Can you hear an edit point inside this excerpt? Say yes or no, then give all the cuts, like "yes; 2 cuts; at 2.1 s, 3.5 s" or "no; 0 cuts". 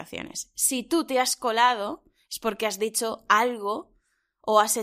no; 0 cuts